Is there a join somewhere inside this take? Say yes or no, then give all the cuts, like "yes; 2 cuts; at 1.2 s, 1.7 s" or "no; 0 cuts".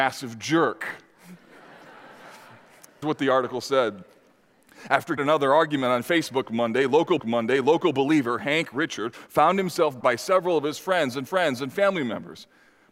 yes; 5 cuts; at 3.0 s, 5.2 s, 7.2 s, 10.0 s, 11.3 s